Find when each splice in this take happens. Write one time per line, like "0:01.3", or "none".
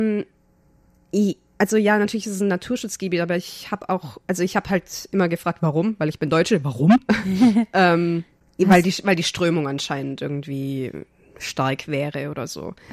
none